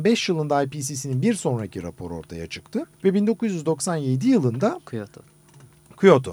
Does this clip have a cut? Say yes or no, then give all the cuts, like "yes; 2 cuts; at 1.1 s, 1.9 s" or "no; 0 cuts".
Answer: yes; 1 cut; at 2.9 s